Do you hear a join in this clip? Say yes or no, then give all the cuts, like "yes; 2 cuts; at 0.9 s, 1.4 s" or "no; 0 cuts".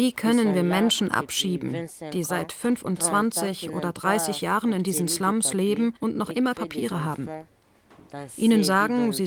yes; 2 cuts; at 6.0 s, 6.5 s